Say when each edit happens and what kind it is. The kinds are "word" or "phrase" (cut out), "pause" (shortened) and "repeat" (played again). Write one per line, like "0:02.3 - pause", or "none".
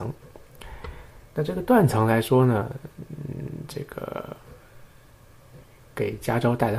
0:01.3 - pause